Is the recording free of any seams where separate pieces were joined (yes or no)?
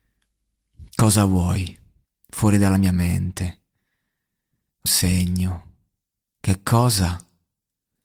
no